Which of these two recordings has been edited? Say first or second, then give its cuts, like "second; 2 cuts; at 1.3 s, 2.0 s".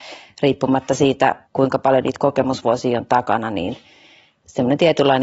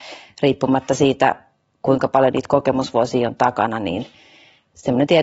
first; 1 cut; at 1.4 s